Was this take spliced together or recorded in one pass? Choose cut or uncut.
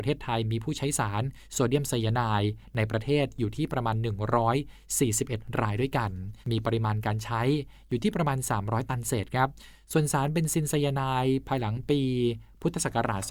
cut